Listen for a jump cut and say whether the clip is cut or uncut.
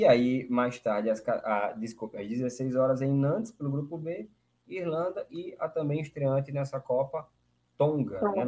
uncut